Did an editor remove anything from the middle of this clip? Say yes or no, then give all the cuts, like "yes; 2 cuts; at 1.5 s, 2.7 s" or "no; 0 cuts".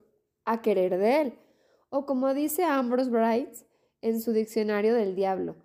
no; 0 cuts